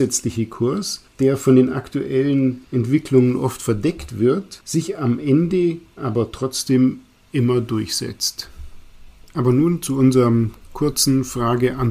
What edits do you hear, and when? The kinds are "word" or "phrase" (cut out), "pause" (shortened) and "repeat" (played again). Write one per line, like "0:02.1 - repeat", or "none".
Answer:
none